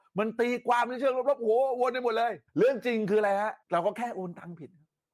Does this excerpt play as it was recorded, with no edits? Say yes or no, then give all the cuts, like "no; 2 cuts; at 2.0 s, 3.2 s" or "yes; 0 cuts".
no; 2 cuts; at 2.5 s, 3.6 s